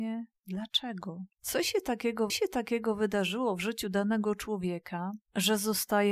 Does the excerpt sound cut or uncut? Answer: cut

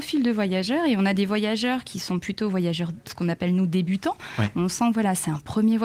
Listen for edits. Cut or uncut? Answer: uncut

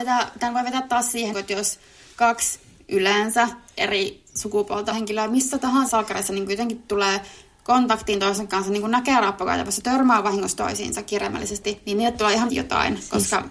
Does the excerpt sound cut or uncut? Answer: cut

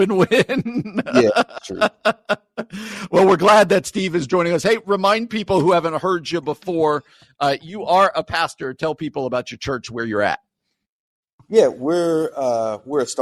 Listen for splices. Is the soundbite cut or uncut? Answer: uncut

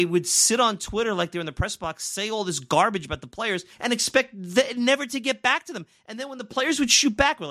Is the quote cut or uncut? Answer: cut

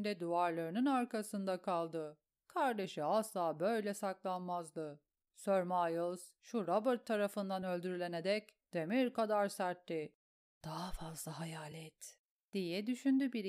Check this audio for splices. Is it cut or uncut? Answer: uncut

